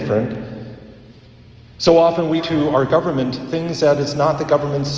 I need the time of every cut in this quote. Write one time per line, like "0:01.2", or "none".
0:02.4